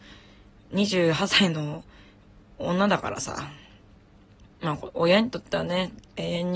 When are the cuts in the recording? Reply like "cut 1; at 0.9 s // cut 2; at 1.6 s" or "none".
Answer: none